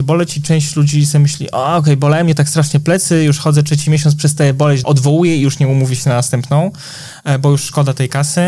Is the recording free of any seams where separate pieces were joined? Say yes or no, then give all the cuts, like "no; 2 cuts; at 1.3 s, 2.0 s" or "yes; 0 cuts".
no; 1 cut; at 4.8 s